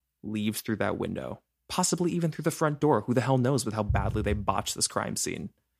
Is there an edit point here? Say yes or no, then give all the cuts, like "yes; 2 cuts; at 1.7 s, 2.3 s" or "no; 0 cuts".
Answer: no; 0 cuts